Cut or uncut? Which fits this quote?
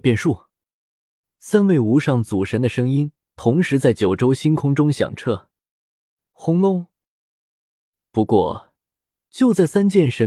uncut